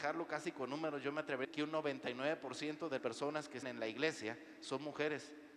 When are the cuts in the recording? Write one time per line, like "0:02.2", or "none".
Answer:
0:01.4
0:03.0
0:03.6